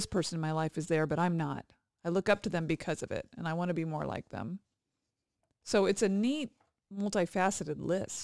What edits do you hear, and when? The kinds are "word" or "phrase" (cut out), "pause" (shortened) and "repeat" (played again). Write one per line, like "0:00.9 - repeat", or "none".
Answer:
none